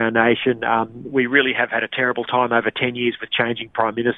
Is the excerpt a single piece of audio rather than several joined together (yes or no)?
no